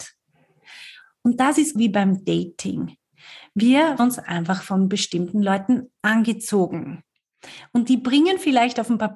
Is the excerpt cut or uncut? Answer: cut